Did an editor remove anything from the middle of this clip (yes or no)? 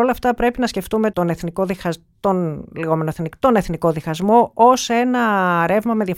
yes